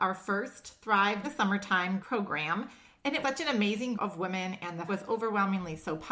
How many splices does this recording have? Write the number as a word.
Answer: five